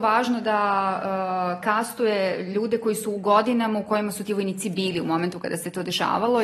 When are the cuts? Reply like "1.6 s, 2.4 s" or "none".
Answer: none